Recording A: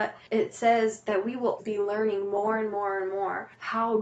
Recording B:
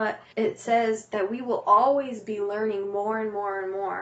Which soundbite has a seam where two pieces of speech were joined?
A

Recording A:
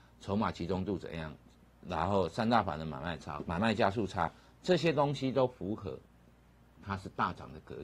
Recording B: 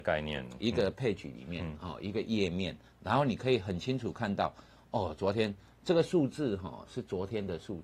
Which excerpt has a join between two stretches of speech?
A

